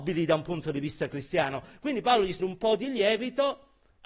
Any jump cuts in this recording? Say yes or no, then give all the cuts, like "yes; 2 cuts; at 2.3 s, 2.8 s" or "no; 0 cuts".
yes; 1 cut; at 2.4 s